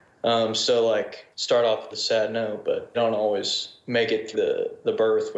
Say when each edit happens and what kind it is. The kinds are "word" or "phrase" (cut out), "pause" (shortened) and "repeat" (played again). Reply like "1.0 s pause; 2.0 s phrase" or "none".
1.3 s pause; 1.9 s phrase; 2.9 s word; 4.3 s word